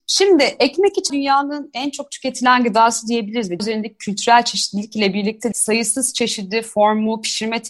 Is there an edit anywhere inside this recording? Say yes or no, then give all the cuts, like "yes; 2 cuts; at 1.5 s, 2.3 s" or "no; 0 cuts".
yes; 3 cuts; at 1.1 s, 3.6 s, 5.5 s